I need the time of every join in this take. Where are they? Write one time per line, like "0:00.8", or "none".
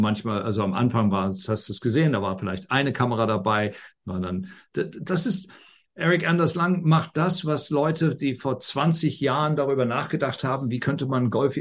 none